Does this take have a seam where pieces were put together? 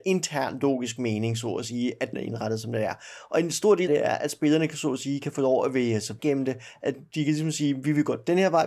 yes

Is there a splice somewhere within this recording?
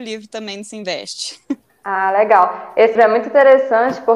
yes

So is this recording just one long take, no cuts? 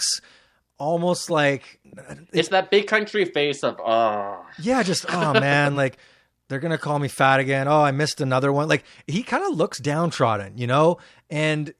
yes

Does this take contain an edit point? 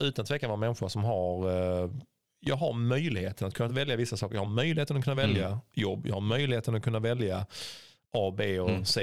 no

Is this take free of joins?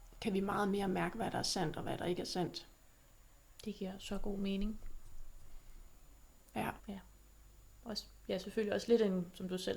no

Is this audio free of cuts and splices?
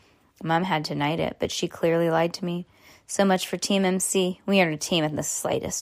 yes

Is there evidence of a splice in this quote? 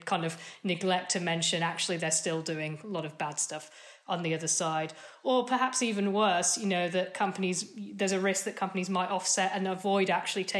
no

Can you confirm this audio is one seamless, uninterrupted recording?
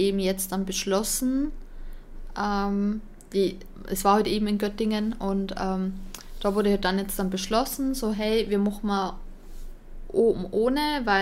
yes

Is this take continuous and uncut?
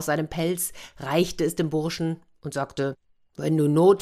yes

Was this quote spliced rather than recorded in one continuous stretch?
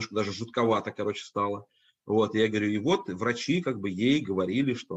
no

